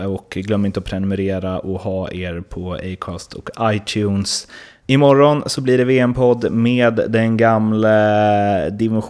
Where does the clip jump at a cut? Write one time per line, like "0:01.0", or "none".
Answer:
none